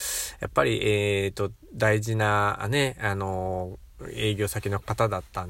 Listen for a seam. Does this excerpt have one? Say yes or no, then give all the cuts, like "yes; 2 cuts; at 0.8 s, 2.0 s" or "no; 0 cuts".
no; 0 cuts